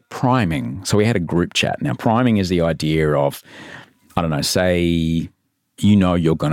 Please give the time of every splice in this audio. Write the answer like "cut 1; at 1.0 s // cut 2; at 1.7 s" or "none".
none